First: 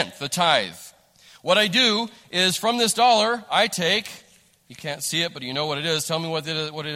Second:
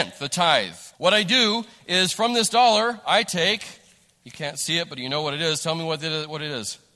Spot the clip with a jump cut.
second; 1 cut; at 0.9 s

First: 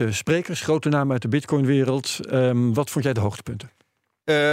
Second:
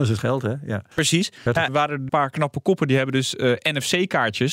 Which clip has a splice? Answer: second; 3 cuts; at 0.9 s, 1.7 s, 2.1 s

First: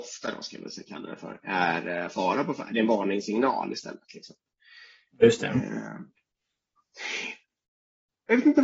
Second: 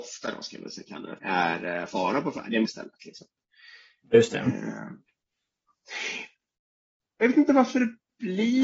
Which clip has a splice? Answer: second; 2 cuts; at 1.2 s, 2.6 s

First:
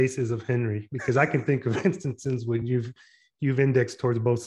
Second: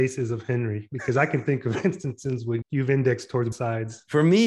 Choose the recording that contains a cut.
second; 2 cuts; at 2.6 s, 3.5 s

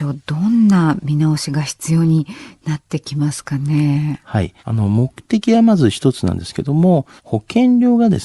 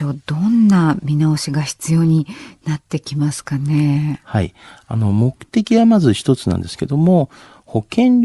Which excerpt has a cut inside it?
first; 2 cuts; at 4.6 s, 7.2 s

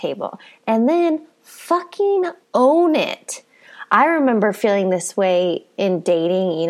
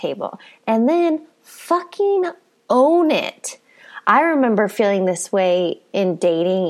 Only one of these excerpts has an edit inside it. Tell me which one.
first; 1 cut; at 2.4 s

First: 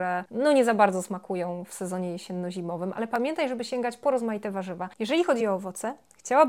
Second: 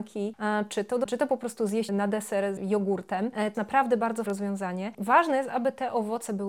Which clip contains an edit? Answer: second; 5 cuts; at 1.0 s, 1.9 s, 2.6 s, 3.5 s, 4.3 s

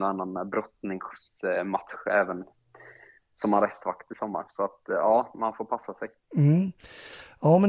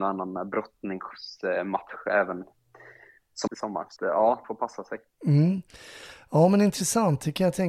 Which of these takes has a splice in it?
second; 3 cuts; at 3.5 s, 4.0 s, 4.4 s

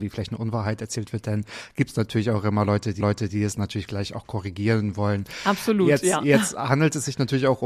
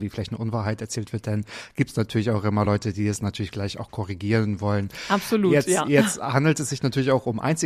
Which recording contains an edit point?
first; 1 cut; at 3.0 s

